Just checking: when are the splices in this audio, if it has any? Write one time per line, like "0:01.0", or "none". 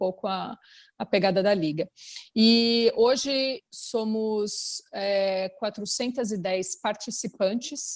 0:03.7